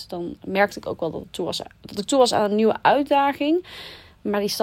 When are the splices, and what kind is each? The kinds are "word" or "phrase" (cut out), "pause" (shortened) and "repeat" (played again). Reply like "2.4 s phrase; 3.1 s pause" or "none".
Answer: none